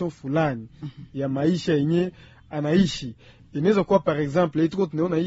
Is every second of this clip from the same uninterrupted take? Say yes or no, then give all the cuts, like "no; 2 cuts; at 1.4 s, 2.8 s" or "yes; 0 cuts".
yes; 0 cuts